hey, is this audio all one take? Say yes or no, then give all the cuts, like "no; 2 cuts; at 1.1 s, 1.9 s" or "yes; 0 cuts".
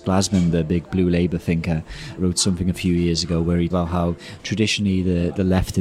no; 2 cuts; at 2.2 s, 3.7 s